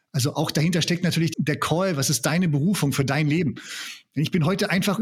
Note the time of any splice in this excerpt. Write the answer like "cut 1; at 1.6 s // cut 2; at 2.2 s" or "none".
cut 1; at 1.3 s

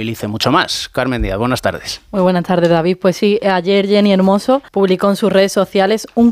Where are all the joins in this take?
cut 1; at 4.7 s

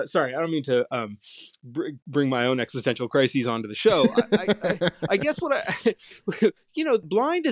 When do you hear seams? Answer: cut 1; at 6.6 s

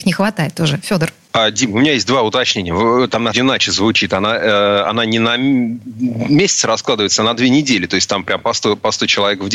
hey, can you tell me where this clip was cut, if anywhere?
cut 1; at 3.3 s

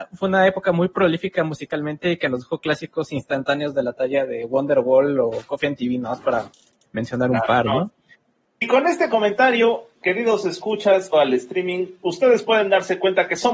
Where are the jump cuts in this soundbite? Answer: cut 1; at 11.1 s

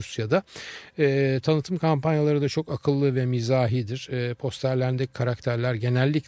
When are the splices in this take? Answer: none

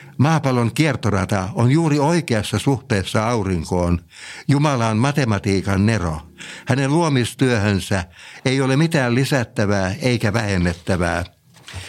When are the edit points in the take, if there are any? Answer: none

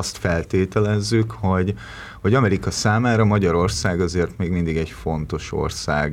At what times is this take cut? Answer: none

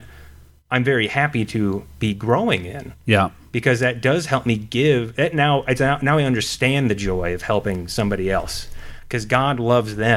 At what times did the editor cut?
none

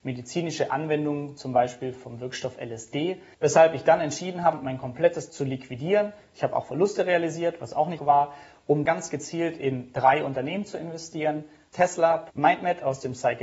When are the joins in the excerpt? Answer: cut 1; at 3.3 s // cut 2; at 5.3 s // cut 3; at 8.0 s // cut 4; at 8.9 s

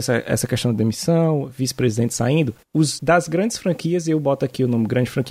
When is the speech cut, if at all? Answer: cut 1; at 3.0 s

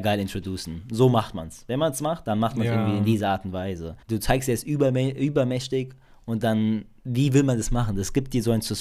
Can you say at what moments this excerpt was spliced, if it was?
cut 1; at 4.0 s

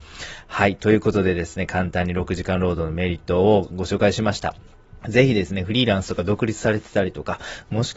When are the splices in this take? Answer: cut 1; at 5.0 s

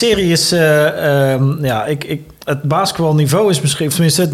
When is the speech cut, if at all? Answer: none

